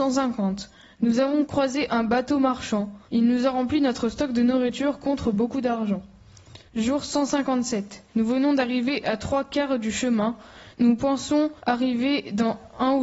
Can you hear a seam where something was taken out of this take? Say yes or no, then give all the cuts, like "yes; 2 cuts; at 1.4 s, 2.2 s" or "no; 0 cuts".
yes; 5 cuts; at 3.0 s, 6.7 s, 8.1 s, 10.7 s, 11.6 s